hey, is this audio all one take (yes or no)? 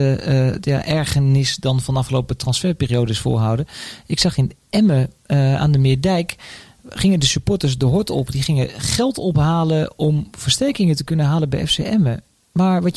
yes